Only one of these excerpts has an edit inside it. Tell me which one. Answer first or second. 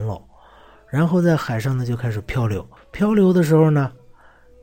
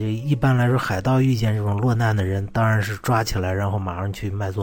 first